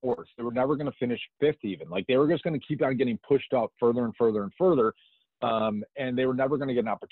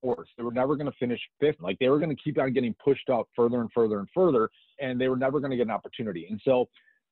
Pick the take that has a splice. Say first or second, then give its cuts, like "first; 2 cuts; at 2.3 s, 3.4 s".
second; 3 cuts; at 1.6 s, 2.0 s, 4.7 s